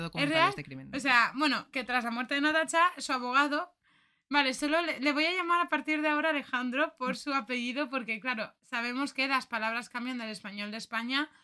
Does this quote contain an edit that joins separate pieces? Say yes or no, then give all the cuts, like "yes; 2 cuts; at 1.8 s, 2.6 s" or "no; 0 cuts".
yes; 2 cuts; at 1.7 s, 8.6 s